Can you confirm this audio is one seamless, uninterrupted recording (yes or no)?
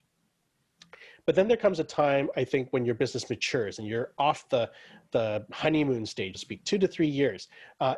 no